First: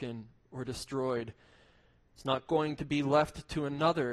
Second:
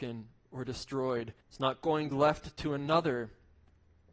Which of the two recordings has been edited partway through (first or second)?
second